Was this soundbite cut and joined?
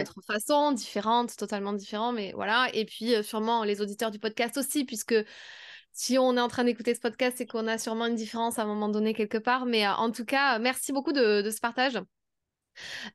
no; 0 cuts

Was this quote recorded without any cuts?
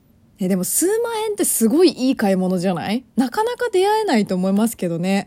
no; 1 cut; at 3.1 s

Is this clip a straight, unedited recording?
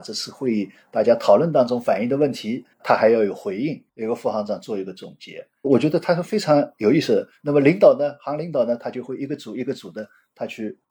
no; 2 cuts; at 2.7 s, 3.9 s

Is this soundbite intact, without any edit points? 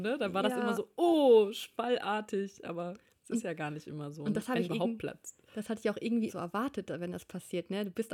no; 2 cuts; at 4.6 s, 6.3 s

